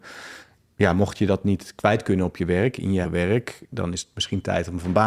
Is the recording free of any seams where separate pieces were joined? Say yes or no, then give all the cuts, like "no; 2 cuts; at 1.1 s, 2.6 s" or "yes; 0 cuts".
no; 1 cut; at 3.0 s